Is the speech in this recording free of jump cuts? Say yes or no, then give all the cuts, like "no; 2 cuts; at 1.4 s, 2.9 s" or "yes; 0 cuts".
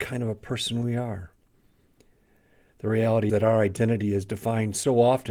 no; 1 cut; at 3.3 s